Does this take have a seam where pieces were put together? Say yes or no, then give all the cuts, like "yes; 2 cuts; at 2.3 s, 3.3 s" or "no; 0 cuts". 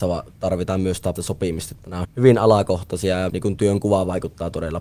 yes; 3 cuts; at 1.2 s, 2.0 s, 3.3 s